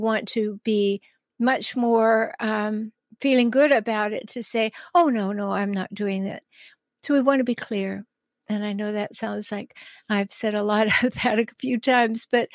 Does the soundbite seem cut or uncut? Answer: uncut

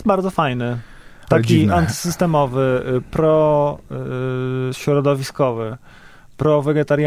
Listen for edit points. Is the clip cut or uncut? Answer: uncut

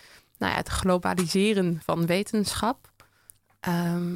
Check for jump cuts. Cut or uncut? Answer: uncut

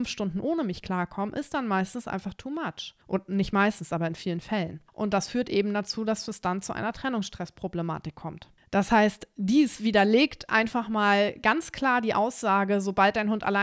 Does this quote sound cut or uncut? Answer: cut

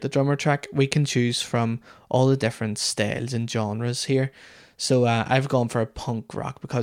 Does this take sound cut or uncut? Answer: uncut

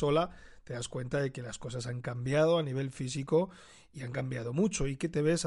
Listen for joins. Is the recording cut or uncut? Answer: uncut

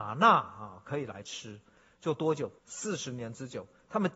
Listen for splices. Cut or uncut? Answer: cut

